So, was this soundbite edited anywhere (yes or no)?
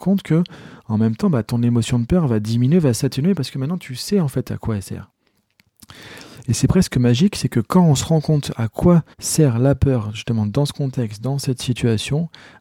yes